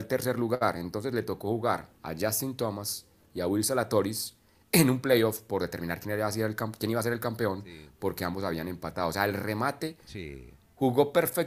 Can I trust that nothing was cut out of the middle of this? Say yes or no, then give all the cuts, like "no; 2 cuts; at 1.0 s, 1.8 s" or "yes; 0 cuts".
no; 1 cut; at 1.9 s